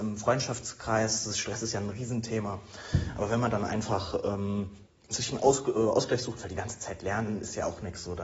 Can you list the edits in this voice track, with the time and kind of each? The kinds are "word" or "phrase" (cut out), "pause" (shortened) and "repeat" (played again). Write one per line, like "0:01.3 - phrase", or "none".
0:04.9 - pause